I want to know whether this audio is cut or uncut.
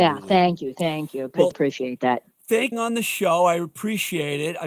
cut